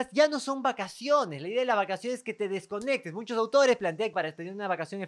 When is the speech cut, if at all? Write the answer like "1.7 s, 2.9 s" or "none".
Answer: 4.1 s